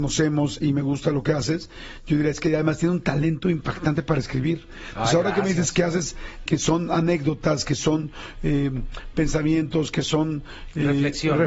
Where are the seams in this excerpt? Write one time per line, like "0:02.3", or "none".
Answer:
0:06.5